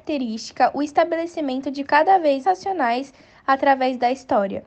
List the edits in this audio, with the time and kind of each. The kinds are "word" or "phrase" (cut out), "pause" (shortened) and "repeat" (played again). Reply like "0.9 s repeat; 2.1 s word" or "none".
1.8 s word; 2.4 s word

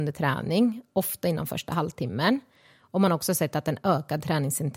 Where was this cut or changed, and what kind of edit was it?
none

